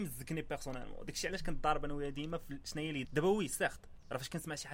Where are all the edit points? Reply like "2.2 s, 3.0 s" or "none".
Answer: 3.0 s

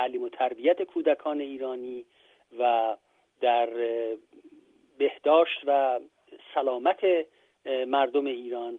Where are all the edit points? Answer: none

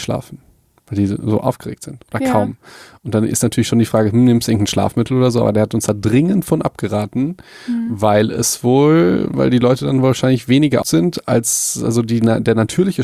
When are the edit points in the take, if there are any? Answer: 10.8 s

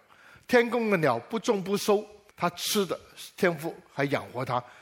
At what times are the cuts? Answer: 2.3 s

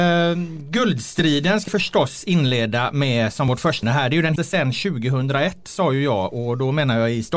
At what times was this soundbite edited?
1.7 s, 3.8 s, 4.4 s

